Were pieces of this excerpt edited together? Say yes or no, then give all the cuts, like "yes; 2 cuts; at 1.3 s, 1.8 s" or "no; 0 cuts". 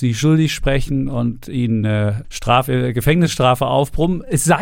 yes; 1 cut; at 2.2 s